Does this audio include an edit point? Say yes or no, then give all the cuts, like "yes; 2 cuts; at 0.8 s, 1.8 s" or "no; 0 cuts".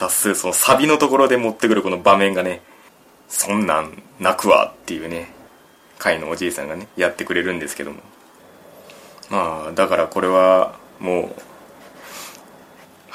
no; 0 cuts